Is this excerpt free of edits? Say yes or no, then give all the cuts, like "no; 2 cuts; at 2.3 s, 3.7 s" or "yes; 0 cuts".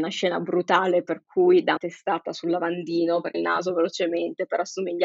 no; 2 cuts; at 1.8 s, 3.3 s